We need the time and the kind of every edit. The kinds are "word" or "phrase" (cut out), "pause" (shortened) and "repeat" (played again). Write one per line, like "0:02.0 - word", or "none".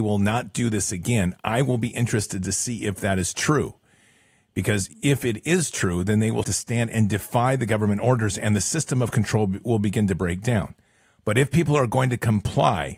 0:06.4 - word

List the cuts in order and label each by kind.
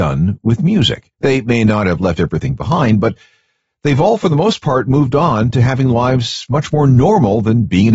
0:01.1 - pause

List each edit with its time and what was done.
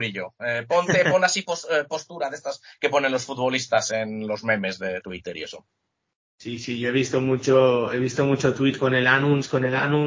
none

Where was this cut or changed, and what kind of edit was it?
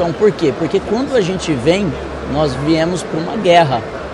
none

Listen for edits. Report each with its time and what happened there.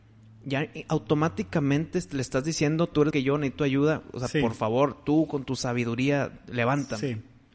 0:03.1 - word

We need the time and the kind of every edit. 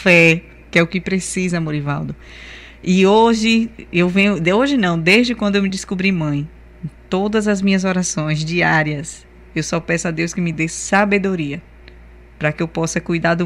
none

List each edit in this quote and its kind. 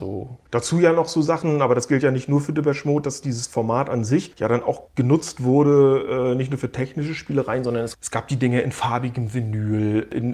0:04.9 - pause

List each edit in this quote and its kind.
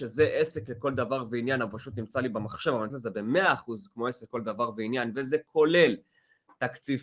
0:02.9 - phrase

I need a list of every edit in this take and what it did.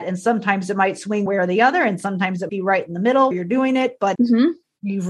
0:01.3 - word
0:02.5 - word
0:03.3 - word
0:04.1 - word

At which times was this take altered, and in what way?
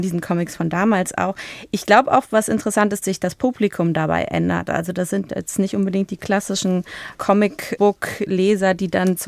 0:03.0 - word

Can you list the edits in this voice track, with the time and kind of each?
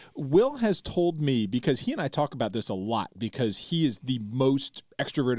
none

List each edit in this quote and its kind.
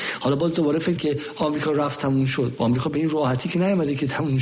0:01.0 - word

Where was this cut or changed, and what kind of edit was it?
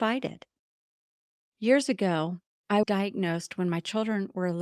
0:02.8 - word

